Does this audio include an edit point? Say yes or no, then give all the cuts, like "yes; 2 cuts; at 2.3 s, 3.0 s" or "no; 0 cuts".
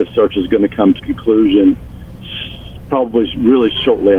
yes; 1 cut; at 1.0 s